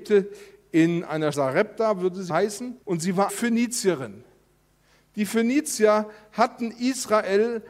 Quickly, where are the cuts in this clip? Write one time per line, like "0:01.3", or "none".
0:01.3
0:02.3
0:02.8
0:03.3